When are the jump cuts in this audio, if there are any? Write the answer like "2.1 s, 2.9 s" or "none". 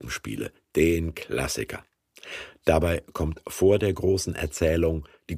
none